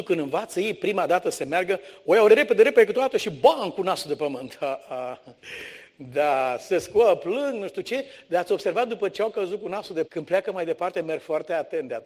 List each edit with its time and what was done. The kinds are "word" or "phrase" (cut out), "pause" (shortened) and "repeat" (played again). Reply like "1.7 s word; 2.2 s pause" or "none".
2.3 s word; 10.0 s word